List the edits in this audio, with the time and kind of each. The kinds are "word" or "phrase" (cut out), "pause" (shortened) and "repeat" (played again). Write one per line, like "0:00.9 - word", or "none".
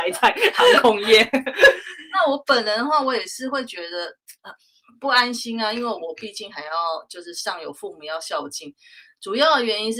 0:04.4 - pause